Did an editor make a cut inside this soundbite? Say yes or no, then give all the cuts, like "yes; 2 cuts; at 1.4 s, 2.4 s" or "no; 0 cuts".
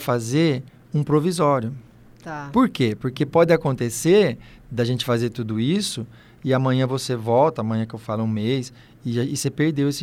no; 0 cuts